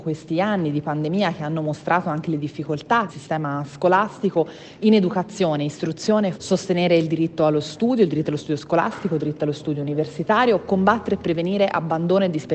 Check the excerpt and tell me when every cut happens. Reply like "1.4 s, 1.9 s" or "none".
3.1 s, 6.3 s